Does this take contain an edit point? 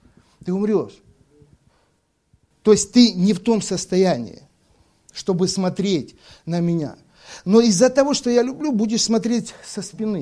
no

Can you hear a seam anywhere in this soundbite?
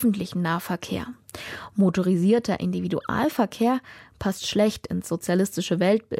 no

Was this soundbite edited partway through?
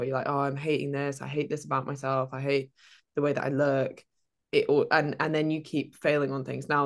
no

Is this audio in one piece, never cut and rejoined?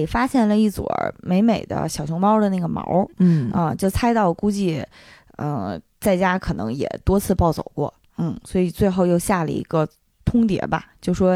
yes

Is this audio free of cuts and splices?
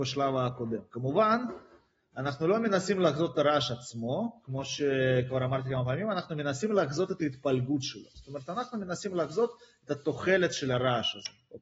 yes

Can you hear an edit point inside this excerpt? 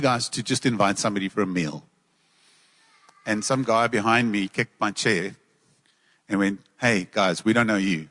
no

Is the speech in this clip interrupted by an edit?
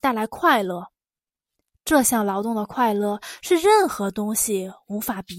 no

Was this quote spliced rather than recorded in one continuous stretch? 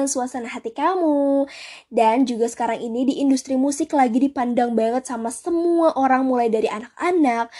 no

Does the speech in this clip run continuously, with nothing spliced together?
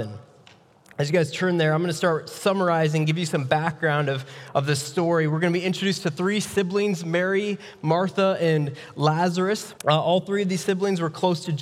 no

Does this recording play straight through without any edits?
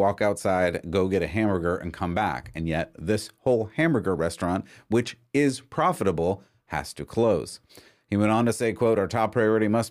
yes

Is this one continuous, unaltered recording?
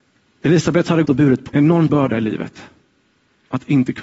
no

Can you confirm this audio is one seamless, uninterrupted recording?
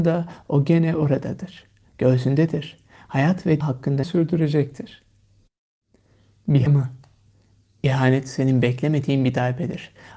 no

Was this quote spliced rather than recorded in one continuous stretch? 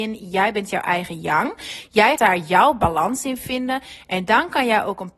yes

